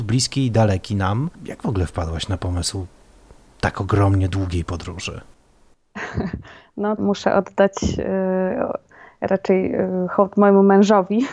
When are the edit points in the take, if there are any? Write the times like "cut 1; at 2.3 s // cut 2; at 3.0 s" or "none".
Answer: cut 1; at 7.0 s